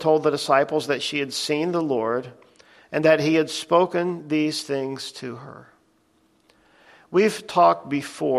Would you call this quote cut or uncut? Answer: uncut